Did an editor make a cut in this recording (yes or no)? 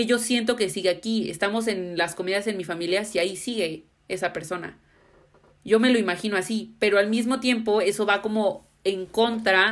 no